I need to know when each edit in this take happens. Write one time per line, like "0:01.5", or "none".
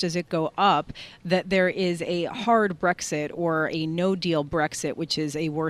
none